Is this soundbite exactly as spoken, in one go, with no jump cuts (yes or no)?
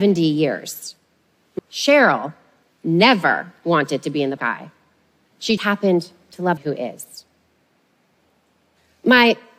no